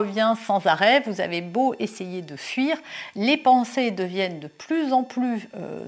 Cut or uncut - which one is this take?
uncut